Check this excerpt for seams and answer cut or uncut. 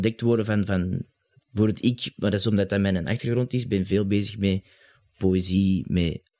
uncut